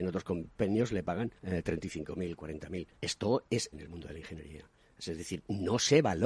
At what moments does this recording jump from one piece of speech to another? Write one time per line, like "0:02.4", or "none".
0:01.4
0:03.0
0:03.7

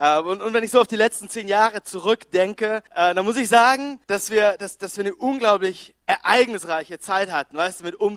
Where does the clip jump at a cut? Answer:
0:02.9
0:04.0
0:06.0

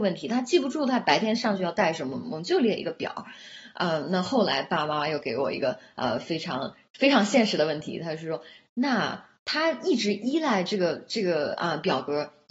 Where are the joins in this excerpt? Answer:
none

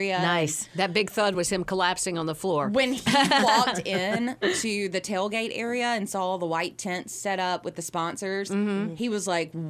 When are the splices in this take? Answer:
none

